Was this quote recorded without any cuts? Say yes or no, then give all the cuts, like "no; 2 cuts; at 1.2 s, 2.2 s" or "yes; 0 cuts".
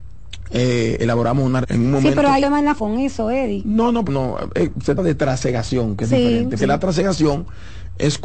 no; 7 cuts; at 1.0 s, 1.6 s, 2.4 s, 2.8 s, 4.1 s, 5.0 s, 6.6 s